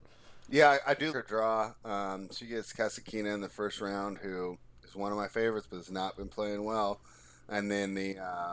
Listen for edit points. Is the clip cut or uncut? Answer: cut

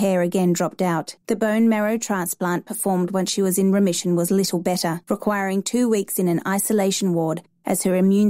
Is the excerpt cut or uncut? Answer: cut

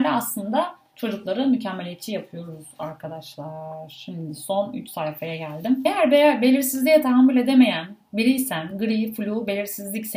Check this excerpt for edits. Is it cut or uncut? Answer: uncut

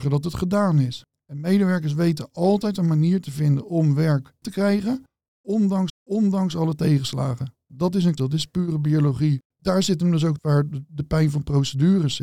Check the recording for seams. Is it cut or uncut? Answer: cut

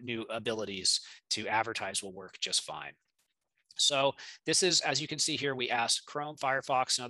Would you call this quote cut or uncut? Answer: uncut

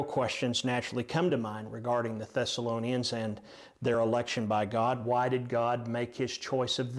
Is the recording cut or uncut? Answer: uncut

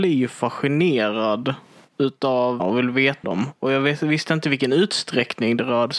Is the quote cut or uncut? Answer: cut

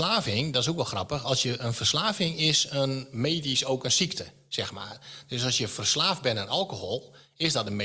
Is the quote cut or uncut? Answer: uncut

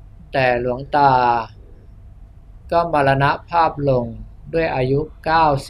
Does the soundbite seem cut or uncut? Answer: cut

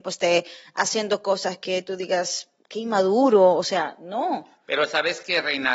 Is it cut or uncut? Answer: uncut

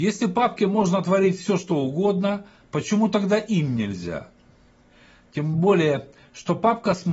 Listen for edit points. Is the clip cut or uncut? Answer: uncut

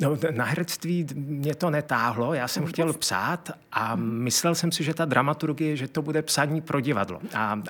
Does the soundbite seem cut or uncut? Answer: uncut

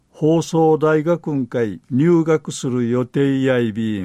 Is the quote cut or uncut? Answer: cut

